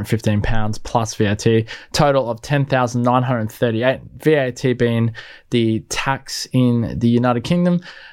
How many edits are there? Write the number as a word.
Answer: zero